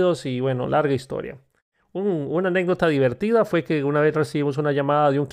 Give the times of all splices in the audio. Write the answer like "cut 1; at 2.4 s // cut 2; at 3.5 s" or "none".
none